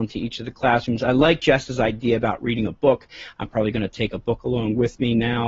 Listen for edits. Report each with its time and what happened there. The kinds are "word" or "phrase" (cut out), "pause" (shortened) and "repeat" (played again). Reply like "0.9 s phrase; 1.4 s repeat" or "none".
none